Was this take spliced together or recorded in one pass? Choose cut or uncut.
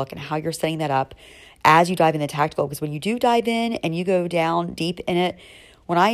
uncut